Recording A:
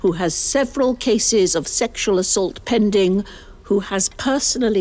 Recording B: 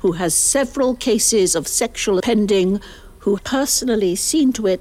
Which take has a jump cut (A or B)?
B